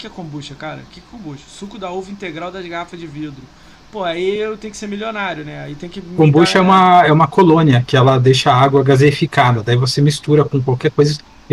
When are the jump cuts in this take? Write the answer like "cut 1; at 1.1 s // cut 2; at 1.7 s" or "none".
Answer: none

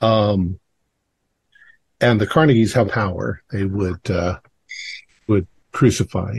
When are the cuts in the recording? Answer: cut 1; at 2.9 s // cut 2; at 5.3 s

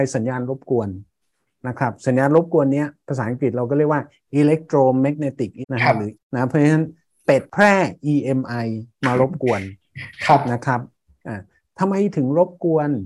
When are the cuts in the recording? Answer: cut 1; at 5.6 s // cut 2; at 6.1 s

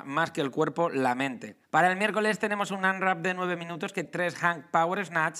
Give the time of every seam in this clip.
cut 1; at 1.6 s // cut 2; at 4.0 s

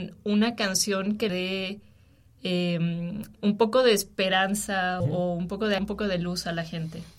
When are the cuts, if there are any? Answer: cut 1; at 1.3 s // cut 2; at 3.4 s // cut 3; at 5.0 s // cut 4; at 5.8 s

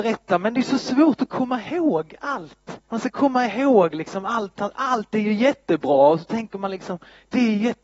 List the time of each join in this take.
cut 1; at 2.8 s

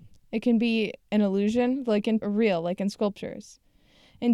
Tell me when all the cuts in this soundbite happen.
cut 1; at 2.2 s

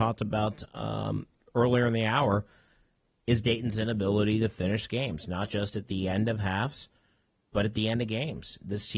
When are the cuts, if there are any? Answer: none

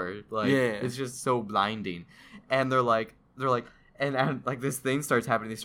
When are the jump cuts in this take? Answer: none

